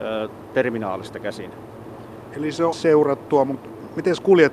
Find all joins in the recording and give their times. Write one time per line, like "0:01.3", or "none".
0:02.7